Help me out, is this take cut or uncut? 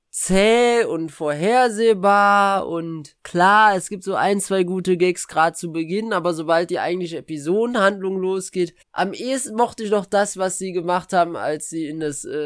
cut